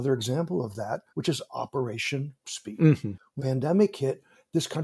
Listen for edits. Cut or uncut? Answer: cut